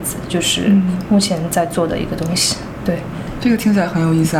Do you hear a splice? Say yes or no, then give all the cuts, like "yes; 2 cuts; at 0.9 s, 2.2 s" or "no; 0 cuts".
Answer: yes; 1 cut; at 3.4 s